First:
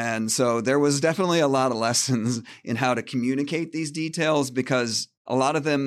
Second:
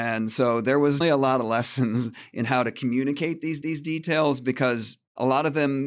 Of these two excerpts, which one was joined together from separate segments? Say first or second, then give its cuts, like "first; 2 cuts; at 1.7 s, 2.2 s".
second; 2 cuts; at 1.0 s, 3.6 s